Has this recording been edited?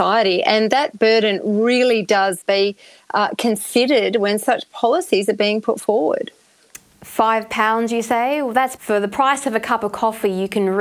yes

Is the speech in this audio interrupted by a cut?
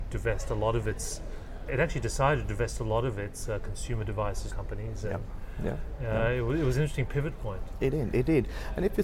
yes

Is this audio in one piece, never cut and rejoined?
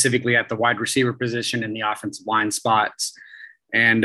yes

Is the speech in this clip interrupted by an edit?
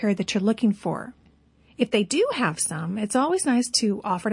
no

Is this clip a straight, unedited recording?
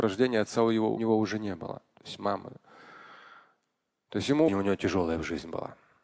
no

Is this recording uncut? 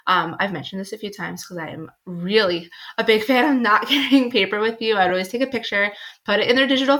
yes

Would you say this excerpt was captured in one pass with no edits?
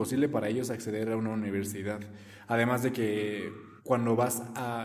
no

